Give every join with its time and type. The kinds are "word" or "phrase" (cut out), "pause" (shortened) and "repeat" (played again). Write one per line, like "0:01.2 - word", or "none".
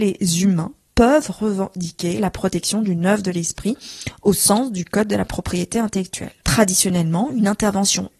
0:06.4 - pause